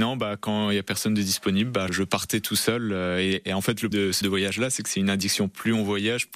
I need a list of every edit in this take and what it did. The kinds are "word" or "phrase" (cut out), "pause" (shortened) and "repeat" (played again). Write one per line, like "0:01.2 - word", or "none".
0:01.9 - word
0:03.9 - word
0:04.2 - word